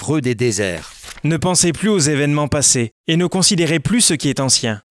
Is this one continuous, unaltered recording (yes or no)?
yes